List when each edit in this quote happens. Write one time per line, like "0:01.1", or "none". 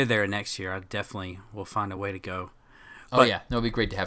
none